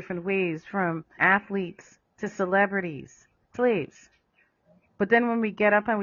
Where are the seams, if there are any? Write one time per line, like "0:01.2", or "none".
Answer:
0:01.2
0:03.5